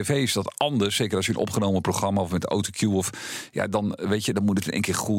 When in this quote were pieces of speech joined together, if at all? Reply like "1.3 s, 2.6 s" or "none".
none